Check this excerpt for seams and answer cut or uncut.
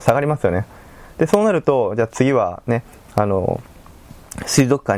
uncut